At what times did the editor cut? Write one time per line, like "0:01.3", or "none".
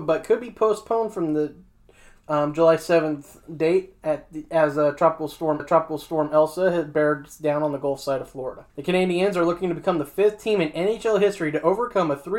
0:05.6
0:08.7